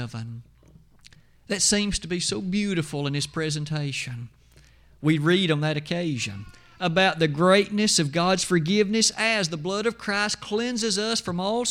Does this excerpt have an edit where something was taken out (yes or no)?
no